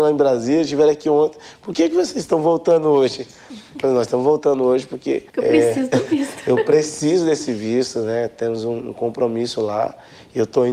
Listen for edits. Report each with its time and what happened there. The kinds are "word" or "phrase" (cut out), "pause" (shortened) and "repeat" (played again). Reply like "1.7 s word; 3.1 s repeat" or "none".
5.3 s pause